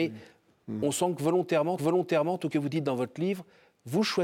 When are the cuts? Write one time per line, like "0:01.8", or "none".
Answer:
0:01.8
0:02.5